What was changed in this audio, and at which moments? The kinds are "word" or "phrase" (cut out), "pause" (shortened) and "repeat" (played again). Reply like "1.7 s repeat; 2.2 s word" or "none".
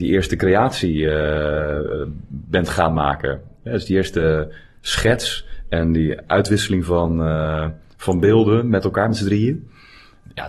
none